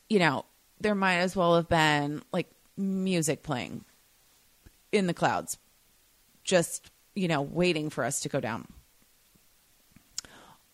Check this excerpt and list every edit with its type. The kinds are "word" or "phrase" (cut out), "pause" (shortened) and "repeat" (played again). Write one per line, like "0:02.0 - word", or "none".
none